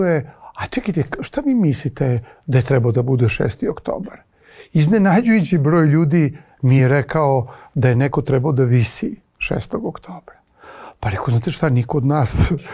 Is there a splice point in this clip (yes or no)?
no